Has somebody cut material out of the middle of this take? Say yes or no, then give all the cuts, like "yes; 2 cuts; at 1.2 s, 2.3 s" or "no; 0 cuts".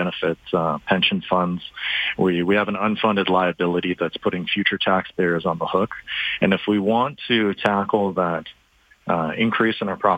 no; 0 cuts